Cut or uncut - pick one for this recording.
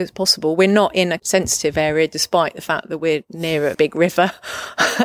cut